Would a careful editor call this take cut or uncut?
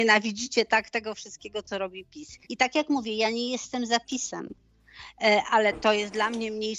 cut